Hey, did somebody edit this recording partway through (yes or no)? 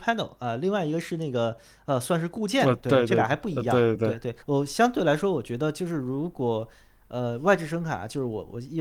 yes